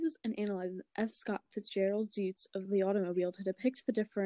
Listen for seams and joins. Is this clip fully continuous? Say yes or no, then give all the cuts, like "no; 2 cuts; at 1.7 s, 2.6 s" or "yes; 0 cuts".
yes; 0 cuts